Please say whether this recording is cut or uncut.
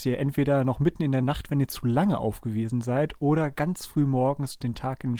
uncut